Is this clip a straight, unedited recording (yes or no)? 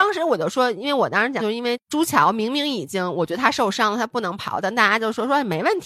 no